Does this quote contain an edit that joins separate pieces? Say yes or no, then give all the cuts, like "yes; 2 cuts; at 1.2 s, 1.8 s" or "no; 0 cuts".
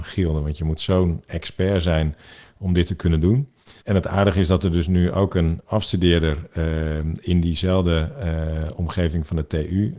yes; 1 cut; at 3.8 s